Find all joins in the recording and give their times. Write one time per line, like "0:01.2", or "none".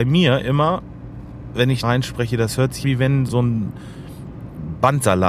0:01.8
0:02.8
0:03.3